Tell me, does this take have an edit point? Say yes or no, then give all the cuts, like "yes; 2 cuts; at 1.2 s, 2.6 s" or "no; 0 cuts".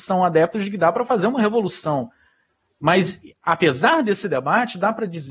no; 0 cuts